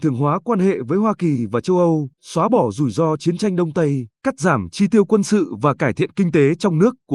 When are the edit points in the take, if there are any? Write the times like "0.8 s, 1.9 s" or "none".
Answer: 2.1 s, 4.1 s

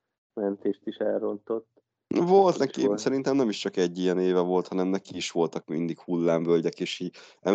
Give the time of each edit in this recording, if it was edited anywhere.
none

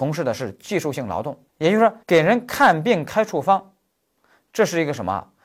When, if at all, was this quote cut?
1.5 s, 2.0 s

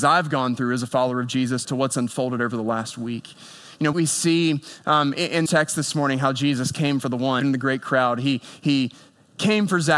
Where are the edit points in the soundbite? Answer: 1.6 s, 3.9 s, 5.5 s, 7.4 s

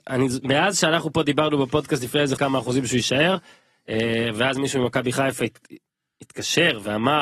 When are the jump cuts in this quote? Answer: 2.4 s

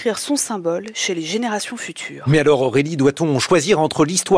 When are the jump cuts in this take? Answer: none

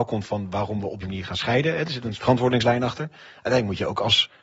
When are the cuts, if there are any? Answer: 1.0 s, 2.1 s

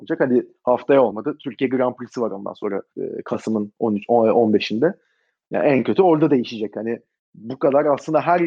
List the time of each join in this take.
2.9 s

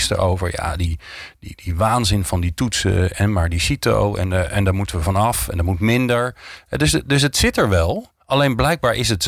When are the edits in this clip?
8.2 s

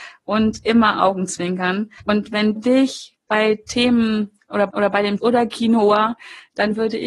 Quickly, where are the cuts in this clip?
0.9 s, 2.0 s, 2.6 s, 4.7 s, 5.2 s

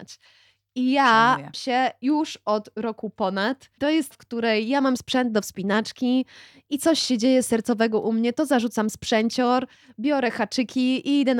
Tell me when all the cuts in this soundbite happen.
1.5 s, 3.8 s, 4.1 s, 5.0 s

